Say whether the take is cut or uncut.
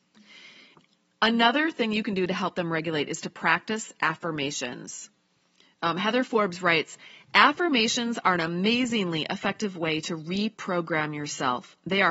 uncut